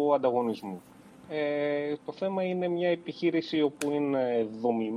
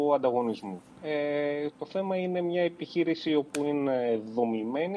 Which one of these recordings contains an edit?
second; 1 cut; at 0.9 s

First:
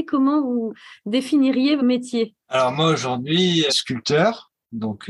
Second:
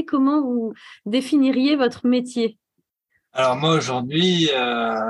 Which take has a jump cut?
first; 3 cuts; at 1.8 s, 2.4 s, 3.7 s

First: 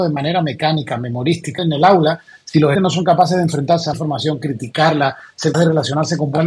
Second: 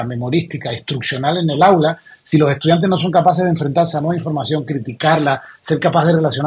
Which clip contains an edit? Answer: first; 4 cuts; at 1.6 s, 2.8 s, 3.9 s, 5.5 s

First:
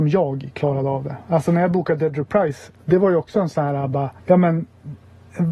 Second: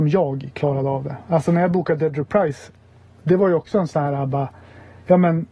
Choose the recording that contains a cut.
first; 2 cuts; at 2.8 s, 4.2 s

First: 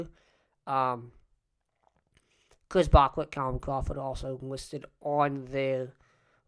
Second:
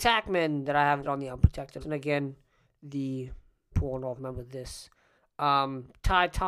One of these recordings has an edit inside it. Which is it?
second; 4 cuts; at 1.0 s, 1.8 s, 3.7 s, 4.2 s

